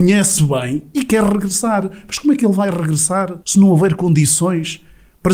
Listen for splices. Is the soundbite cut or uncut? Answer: cut